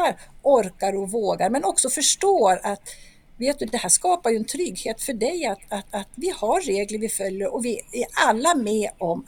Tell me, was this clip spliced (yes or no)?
yes